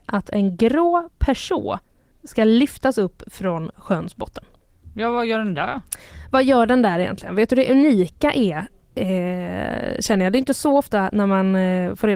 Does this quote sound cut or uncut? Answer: uncut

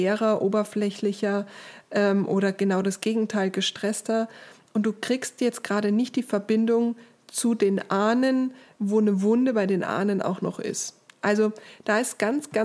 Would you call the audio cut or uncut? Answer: uncut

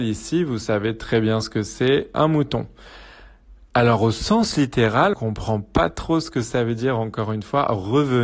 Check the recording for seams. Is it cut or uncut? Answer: cut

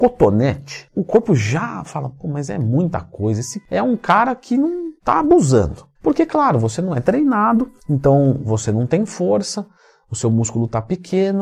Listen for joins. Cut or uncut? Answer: cut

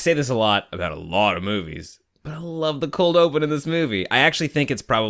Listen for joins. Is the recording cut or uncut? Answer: uncut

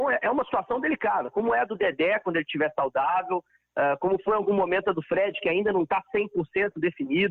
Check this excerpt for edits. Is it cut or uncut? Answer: uncut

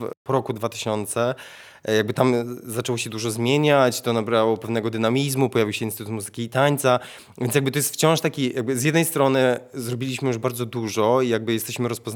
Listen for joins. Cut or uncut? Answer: uncut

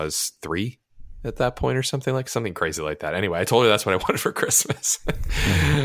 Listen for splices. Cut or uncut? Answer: uncut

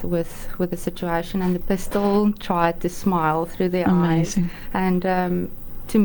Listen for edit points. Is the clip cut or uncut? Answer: cut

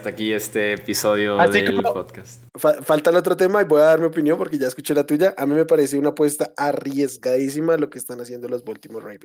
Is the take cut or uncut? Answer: cut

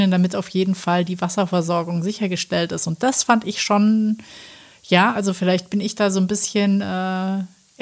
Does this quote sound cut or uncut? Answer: uncut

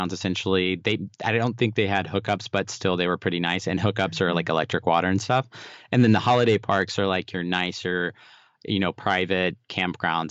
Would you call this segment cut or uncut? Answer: uncut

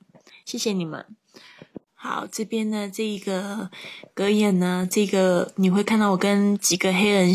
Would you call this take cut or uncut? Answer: cut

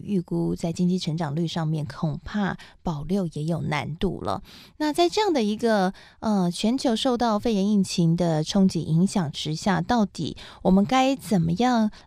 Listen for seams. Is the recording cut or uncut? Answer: uncut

